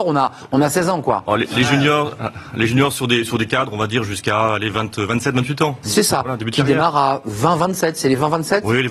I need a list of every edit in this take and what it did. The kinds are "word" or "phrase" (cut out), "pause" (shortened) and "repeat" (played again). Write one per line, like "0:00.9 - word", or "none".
none